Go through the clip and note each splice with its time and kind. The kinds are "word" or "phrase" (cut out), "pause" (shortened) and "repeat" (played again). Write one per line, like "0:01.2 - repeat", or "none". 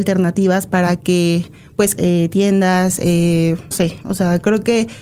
0:02.0 - phrase
0:03.7 - word